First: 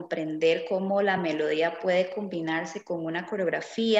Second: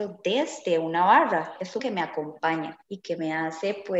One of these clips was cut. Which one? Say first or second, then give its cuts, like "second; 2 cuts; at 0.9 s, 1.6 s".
second; 2 cuts; at 1.8 s, 2.8 s